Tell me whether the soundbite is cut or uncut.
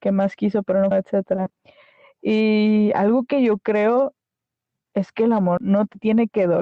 cut